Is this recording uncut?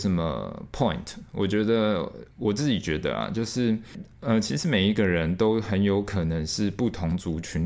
no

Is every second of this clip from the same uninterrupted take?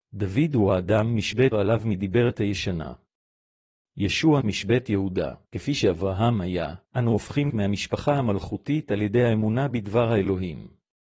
no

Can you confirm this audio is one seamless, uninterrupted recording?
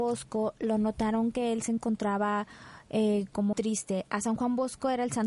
no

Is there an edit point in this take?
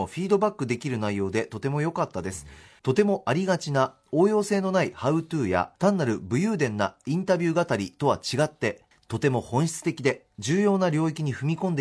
yes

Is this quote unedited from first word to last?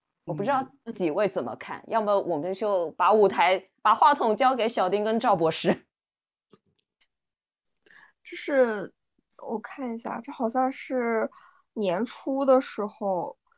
yes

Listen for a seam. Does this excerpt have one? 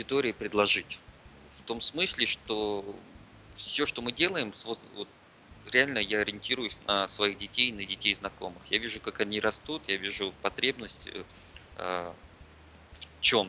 no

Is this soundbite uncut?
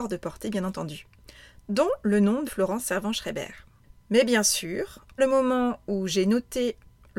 no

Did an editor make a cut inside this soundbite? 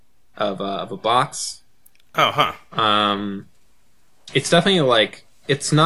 no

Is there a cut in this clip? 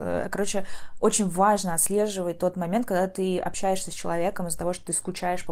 no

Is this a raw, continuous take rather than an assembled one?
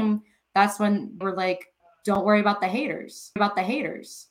no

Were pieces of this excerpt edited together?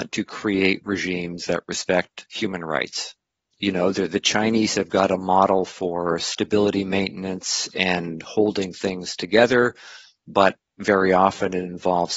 no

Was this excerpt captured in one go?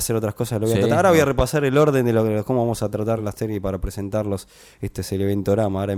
yes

